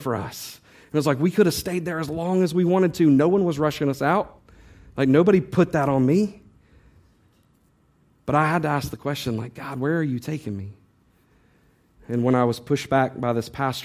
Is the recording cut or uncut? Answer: uncut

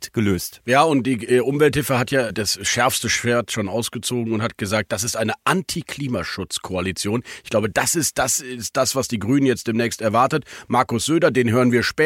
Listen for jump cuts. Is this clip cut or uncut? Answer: cut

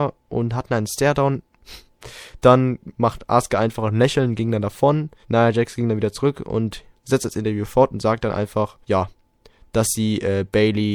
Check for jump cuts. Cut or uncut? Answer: cut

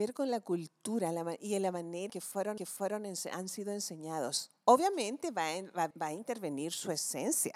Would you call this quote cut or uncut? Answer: cut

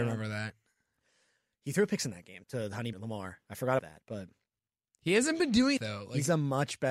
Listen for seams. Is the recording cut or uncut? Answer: cut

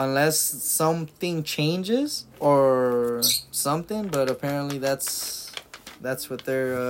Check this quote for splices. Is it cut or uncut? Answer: cut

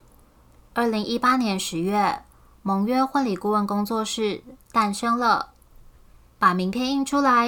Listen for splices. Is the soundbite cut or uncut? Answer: uncut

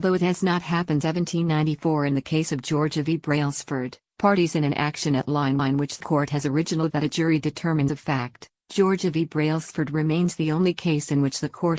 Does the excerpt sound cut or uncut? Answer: cut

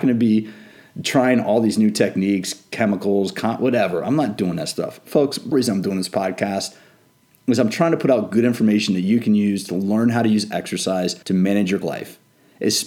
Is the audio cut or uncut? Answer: cut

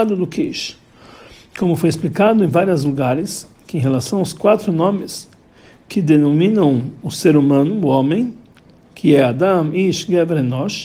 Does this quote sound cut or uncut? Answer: uncut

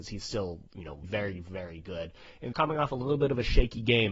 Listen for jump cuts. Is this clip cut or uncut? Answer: cut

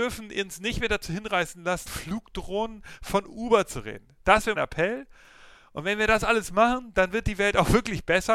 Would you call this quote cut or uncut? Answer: cut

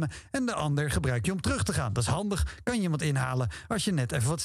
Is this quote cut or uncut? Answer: uncut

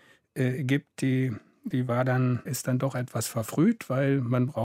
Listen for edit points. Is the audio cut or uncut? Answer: cut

